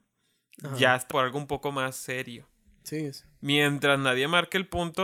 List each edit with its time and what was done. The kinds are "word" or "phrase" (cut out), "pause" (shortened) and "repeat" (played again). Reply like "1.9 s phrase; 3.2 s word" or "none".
1.1 s word